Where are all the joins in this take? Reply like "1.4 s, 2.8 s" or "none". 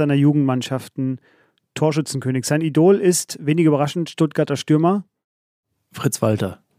none